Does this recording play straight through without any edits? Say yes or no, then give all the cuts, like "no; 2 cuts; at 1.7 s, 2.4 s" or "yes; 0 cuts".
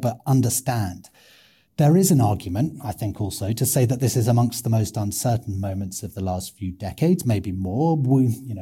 yes; 0 cuts